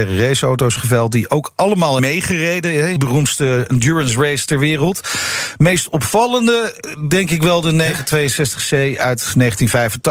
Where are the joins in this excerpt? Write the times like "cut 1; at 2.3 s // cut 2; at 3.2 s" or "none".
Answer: cut 1; at 2.0 s // cut 2; at 3.0 s